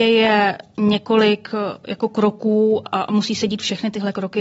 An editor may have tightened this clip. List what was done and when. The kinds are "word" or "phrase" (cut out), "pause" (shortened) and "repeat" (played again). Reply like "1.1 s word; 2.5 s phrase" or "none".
2.8 s word

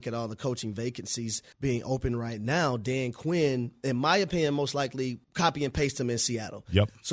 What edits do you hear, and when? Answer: 1.5 s pause; 5.2 s pause

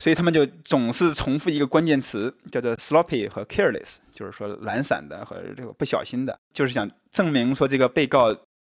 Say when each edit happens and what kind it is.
6.4 s pause

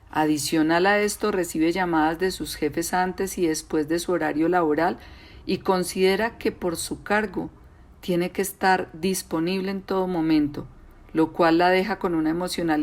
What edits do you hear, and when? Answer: none

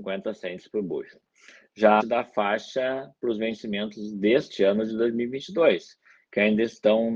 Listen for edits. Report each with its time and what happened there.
2.0 s word

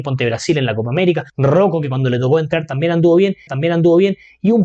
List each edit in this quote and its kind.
1.3 s pause; 3.5 s repeat

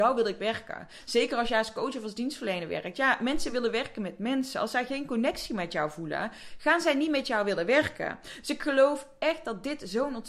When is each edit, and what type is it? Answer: none

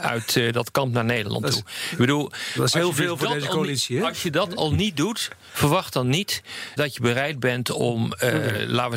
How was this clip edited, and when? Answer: 6.8 s word

